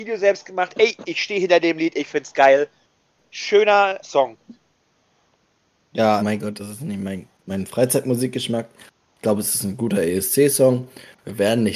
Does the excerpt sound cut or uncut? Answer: cut